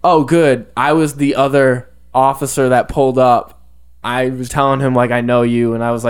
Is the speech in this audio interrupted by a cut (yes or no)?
yes